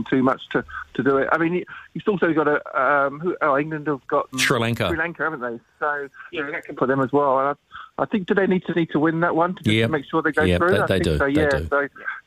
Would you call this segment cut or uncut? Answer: cut